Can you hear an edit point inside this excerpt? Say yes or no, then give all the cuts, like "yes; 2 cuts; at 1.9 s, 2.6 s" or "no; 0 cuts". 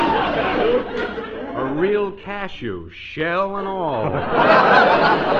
no; 0 cuts